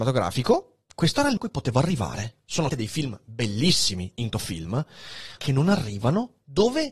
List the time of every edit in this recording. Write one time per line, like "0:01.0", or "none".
0:01.4
0:02.7
0:04.3
0:05.4